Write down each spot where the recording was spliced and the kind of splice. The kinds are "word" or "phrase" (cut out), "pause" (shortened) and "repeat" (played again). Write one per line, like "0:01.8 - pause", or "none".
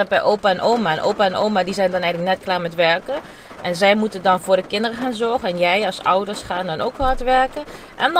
none